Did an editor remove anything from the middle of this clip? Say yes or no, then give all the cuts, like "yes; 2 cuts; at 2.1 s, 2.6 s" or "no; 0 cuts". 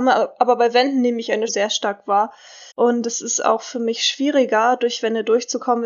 yes; 2 cuts; at 1.5 s, 2.7 s